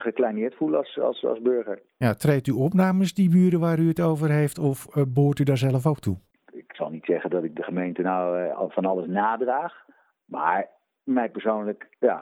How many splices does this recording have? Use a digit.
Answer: 0